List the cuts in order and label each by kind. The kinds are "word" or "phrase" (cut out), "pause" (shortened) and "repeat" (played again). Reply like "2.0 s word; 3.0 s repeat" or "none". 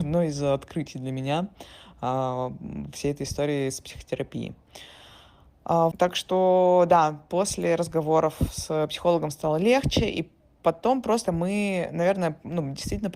5.9 s word; 11.2 s word